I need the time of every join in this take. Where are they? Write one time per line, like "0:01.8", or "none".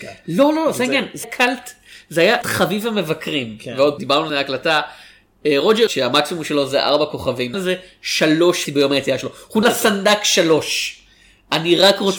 0:01.2
0:02.4
0:04.0
0:04.3
0:05.9
0:07.5
0:08.7
0:09.6

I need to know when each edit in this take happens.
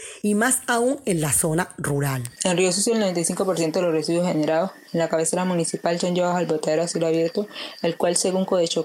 0:02.4

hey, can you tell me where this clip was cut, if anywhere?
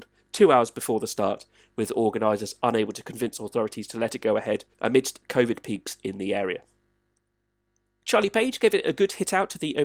0:04.7

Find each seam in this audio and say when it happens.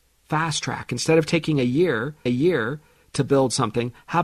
0:02.3

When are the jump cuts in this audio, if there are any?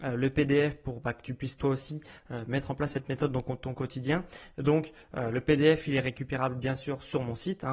none

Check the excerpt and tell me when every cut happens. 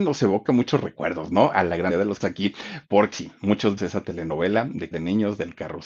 0:01.9
0:02.2
0:03.1
0:03.8
0:04.9

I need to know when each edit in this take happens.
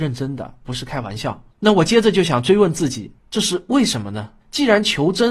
0:01.5
0:03.2
0:04.4

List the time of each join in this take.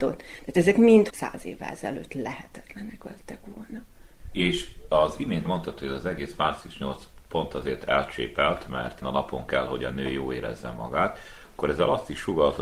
0:01.1
0:05.4
0:09.0

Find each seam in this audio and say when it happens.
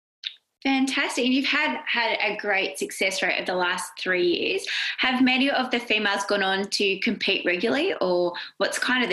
none

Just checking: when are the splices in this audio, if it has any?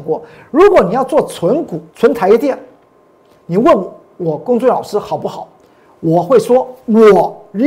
0:01.9

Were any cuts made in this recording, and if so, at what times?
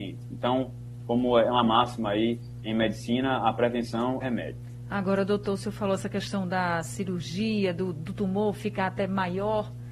0:04.2

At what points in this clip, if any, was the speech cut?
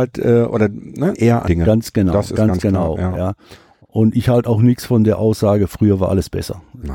0:01.1
0:01.5

